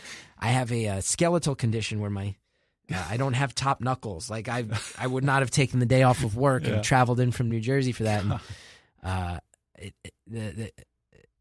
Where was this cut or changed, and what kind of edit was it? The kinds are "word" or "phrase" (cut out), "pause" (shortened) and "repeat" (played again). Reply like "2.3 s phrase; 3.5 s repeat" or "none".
none